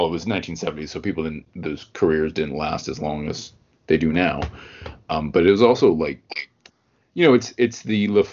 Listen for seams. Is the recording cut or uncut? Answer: uncut